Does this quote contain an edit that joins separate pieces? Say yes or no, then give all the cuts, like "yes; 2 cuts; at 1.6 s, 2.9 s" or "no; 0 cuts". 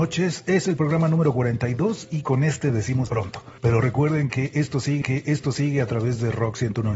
yes; 2 cuts; at 3.1 s, 5.0 s